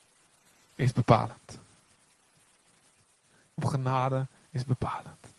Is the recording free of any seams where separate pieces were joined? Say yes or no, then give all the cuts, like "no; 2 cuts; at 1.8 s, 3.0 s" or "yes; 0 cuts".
no; 1 cut; at 3.6 s